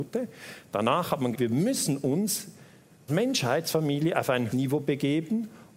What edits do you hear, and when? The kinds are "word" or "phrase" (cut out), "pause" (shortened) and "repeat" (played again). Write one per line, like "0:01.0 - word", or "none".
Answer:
0:01.3 - word
0:03.1 - word
0:04.5 - word